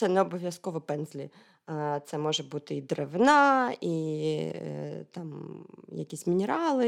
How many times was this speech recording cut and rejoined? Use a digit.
0